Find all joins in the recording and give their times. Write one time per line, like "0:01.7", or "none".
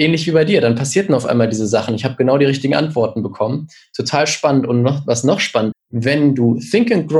0:05.7